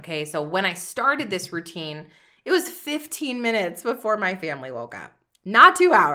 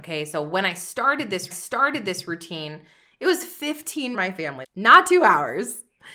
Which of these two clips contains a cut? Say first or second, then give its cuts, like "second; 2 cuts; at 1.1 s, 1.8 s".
second; 3 cuts; at 1.5 s, 4.1 s, 4.6 s